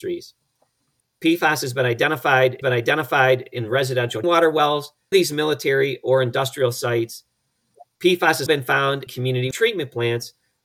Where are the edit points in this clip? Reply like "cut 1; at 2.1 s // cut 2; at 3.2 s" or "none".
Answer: cut 1; at 2.6 s // cut 2; at 4.2 s // cut 3; at 5.1 s // cut 4; at 8.5 s // cut 5; at 9.1 s // cut 6; at 9.5 s